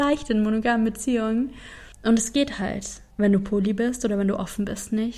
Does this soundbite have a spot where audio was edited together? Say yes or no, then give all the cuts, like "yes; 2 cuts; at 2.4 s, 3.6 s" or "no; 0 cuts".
yes; 2 cuts; at 1.9 s, 3.1 s